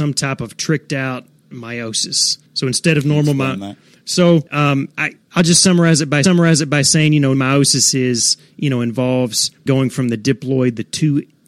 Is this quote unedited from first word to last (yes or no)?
no